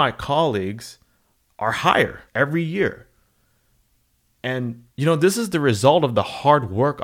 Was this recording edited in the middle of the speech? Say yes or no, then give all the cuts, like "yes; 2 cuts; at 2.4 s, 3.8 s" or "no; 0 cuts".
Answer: yes; 2 cuts; at 2.3 s, 4.9 s